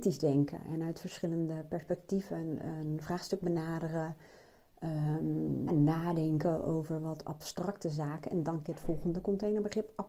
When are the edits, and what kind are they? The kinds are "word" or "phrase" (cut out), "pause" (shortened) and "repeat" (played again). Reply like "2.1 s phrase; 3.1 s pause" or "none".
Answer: 5.7 s word; 8.6 s word